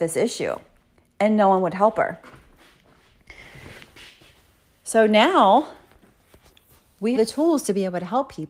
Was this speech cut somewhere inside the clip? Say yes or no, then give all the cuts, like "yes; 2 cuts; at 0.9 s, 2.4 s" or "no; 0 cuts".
yes; 1 cut; at 7.2 s